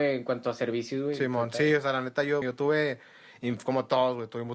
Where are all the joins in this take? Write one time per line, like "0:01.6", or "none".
0:02.4